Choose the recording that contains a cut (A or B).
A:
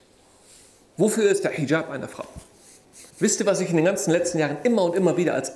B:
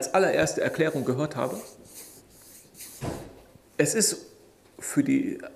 A